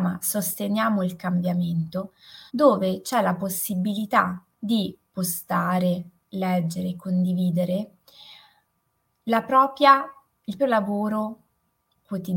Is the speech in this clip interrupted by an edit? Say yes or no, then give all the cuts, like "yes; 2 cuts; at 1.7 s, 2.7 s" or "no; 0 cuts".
yes; 3 cuts; at 2.5 s, 4.5 s, 10.6 s